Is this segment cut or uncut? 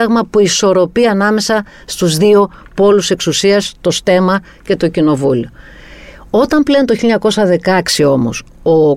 uncut